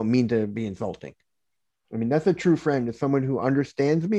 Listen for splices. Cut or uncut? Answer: uncut